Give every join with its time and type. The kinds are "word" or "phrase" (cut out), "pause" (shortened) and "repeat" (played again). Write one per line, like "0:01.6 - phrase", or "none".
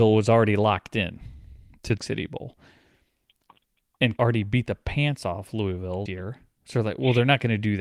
0:02.0 - word
0:04.2 - word
0:06.1 - word